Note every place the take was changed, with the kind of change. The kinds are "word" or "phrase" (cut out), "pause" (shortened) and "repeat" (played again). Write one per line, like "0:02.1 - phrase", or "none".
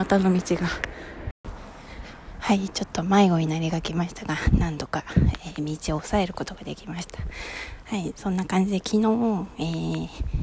none